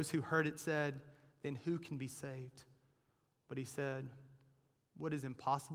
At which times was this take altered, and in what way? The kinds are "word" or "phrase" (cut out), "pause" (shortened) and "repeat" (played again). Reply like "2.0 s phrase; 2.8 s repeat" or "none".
none